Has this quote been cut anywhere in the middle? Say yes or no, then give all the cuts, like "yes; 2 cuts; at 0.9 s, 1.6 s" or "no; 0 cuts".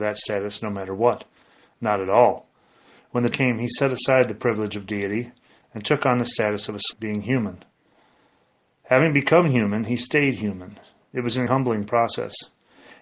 yes; 3 cuts; at 3.3 s, 6.9 s, 11.5 s